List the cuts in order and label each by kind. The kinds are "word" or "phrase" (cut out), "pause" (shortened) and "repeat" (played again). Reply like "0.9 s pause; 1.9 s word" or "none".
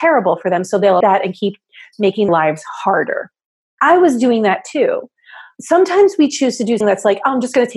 1.0 s word; 2.3 s word; 6.8 s word